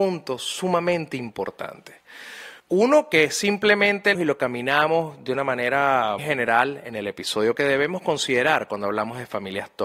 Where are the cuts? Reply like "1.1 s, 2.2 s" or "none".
2.6 s, 4.1 s, 6.2 s, 7.6 s